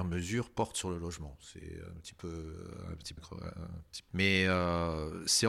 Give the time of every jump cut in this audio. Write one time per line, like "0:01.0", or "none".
0:03.2
0:04.1